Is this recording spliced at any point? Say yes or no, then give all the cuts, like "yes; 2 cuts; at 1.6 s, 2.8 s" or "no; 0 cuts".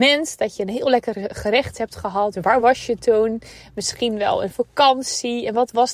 no; 0 cuts